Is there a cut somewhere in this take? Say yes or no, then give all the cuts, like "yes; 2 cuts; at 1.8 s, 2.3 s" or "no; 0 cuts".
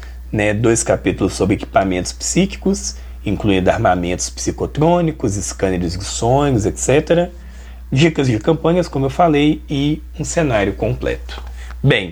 no; 0 cuts